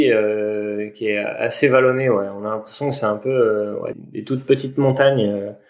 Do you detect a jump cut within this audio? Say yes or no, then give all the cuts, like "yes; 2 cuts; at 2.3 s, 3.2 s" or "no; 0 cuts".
yes; 1 cut; at 3.9 s